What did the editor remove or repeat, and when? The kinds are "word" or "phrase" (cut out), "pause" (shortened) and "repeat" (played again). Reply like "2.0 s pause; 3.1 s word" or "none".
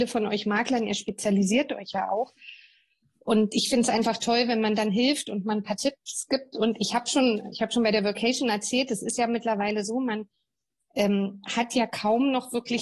none

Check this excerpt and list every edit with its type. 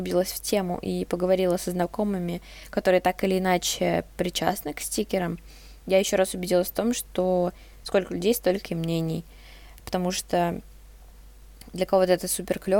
none

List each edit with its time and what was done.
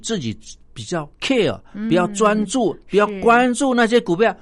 1.1 s pause

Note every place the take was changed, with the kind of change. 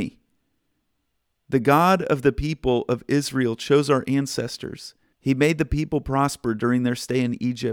5.1 s pause

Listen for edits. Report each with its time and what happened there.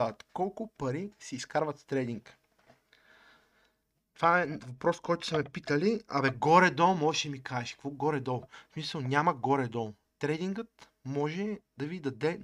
none

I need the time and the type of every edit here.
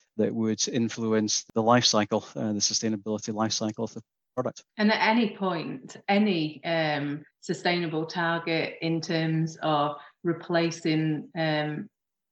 4.7 s pause; 7.3 s pause

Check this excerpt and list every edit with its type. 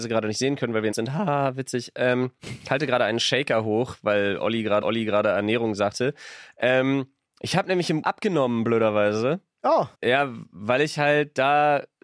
0.9 s word; 4.8 s repeat; 8.0 s word; 9.9 s pause

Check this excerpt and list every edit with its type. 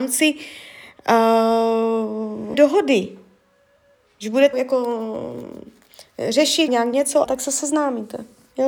2.5 s word; 4.5 s word; 6.7 s word; 7.2 s word

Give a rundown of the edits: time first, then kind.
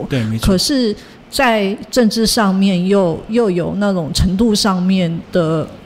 none

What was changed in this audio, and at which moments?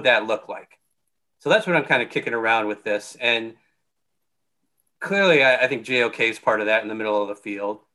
none

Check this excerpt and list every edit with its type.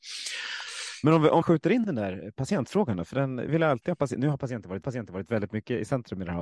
1.4 s word; 3.5 s word; 4.8 s repeat

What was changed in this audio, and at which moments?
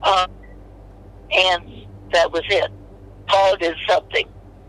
none

